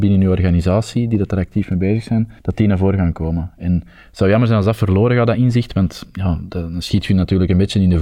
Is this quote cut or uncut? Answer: cut